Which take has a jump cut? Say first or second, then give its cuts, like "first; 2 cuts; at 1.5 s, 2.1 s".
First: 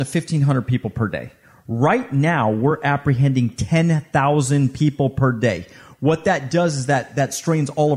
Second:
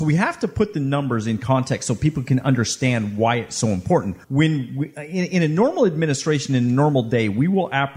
second; 1 cut; at 4.2 s